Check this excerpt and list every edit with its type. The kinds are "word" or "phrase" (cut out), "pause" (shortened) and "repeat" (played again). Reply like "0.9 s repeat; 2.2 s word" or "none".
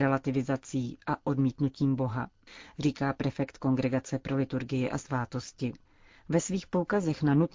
none